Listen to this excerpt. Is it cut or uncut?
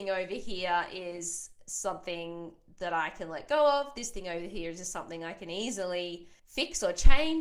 cut